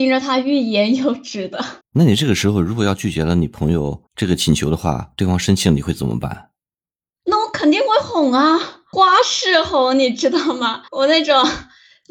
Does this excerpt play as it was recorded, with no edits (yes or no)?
no